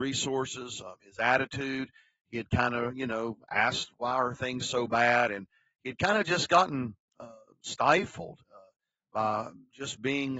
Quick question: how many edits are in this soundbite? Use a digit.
0